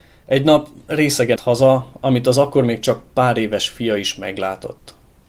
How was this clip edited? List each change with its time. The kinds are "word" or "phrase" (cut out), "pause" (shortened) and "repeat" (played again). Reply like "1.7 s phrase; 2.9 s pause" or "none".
1.4 s word